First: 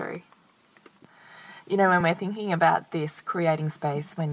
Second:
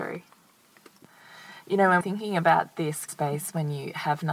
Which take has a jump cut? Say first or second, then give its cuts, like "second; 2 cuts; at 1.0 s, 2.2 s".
second; 2 cuts; at 2.0 s, 3.1 s